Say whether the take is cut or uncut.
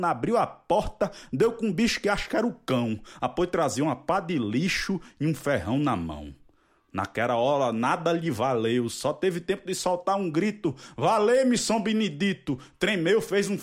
uncut